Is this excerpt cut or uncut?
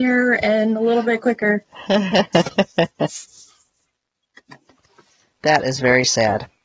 uncut